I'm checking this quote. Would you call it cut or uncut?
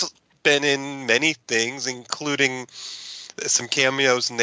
uncut